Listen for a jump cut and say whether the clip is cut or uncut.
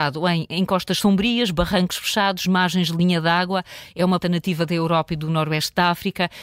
cut